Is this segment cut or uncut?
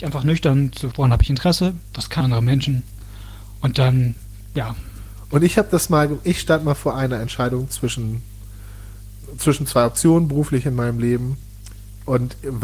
cut